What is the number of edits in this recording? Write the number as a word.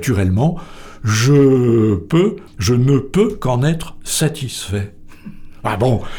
one